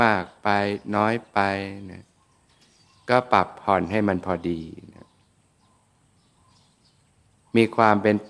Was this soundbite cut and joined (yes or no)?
no